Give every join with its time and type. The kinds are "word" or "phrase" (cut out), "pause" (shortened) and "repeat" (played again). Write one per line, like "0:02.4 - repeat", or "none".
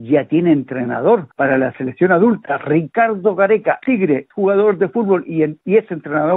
0:01.3 - pause
0:03.8 - word
0:04.3 - word